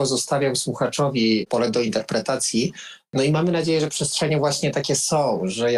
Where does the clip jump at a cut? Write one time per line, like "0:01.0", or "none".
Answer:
none